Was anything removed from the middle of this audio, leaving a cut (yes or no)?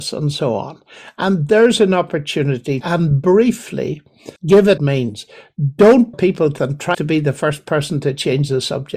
yes